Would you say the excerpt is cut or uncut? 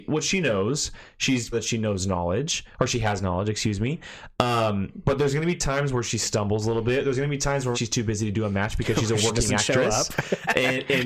cut